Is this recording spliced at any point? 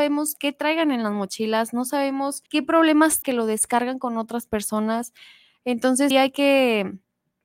yes; 3 cuts; at 2.5 s, 3.2 s, 6.1 s

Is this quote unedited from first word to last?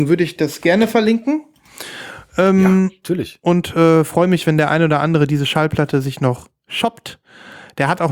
yes; 0 cuts

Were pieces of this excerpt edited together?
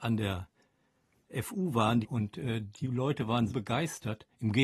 yes; 2 cuts; at 2.0 s, 3.5 s

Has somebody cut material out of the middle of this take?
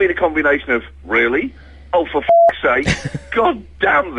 no; 0 cuts

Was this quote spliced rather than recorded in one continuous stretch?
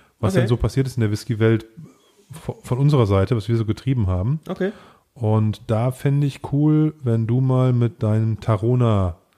no; 0 cuts

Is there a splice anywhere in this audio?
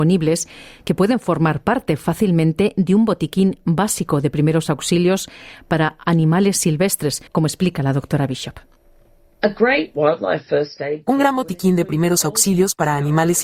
yes; 1 cut; at 7.3 s

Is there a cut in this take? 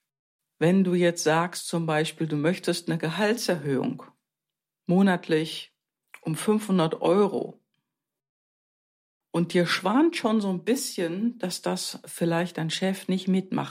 no; 0 cuts

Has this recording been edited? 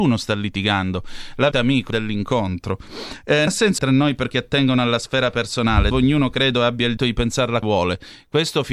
yes; 8 cuts; at 1.5 s, 1.9 s, 3.5 s, 3.8 s, 4.3 s, 5.9 s, 7.0 s, 7.6 s

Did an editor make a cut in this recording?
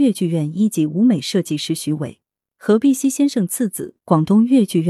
no; 0 cuts

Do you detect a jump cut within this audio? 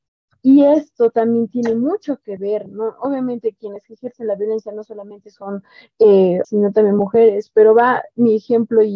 yes; 1 cut; at 6.4 s

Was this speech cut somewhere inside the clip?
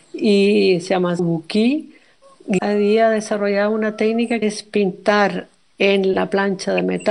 yes; 3 cuts; at 1.2 s, 2.6 s, 4.4 s

